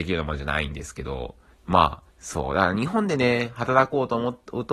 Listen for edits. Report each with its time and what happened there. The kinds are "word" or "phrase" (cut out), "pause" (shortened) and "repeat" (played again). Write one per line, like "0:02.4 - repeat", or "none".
0:01.5 - pause
0:02.1 - pause